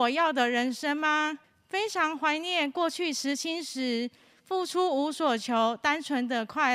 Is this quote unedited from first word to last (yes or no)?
no